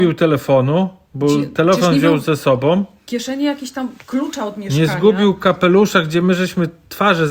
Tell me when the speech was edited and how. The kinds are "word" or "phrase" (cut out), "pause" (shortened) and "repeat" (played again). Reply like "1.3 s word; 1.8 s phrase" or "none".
4.0 s pause